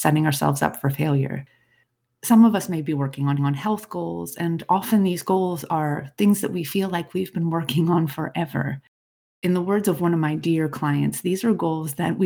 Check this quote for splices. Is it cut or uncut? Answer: cut